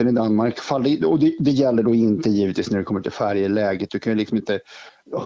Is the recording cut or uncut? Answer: uncut